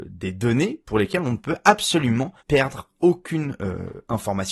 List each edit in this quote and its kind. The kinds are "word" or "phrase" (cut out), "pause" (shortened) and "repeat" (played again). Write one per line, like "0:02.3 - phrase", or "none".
0:02.4 - pause